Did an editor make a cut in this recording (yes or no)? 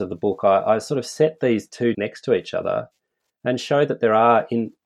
yes